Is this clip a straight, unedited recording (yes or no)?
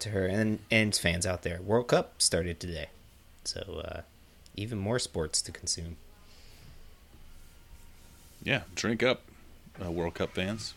no